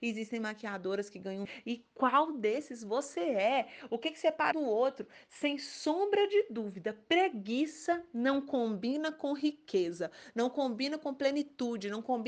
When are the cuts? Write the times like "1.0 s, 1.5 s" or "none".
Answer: 1.4 s, 4.5 s